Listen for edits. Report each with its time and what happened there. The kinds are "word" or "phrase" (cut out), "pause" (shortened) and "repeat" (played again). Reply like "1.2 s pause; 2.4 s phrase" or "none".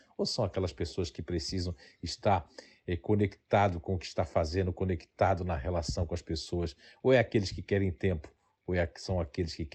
none